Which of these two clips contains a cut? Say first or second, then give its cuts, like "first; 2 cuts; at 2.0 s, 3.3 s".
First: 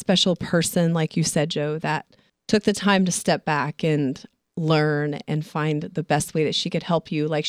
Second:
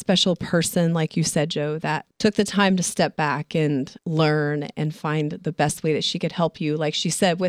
second; 2 cuts; at 2.1 s, 4.0 s